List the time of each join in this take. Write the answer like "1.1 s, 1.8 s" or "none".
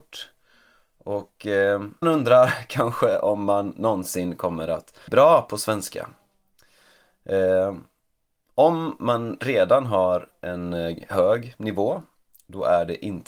2.0 s, 5.1 s

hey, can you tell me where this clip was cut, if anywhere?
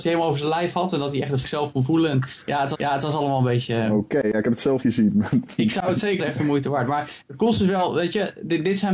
1.4 s, 2.7 s, 4.8 s, 6.2 s

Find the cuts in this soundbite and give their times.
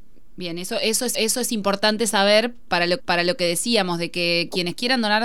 1.1 s, 3.0 s

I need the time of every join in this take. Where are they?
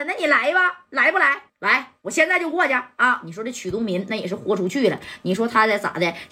1.5 s

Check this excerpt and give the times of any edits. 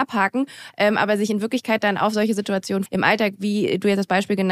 2.9 s

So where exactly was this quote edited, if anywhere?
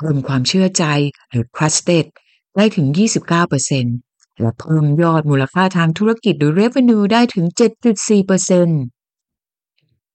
none

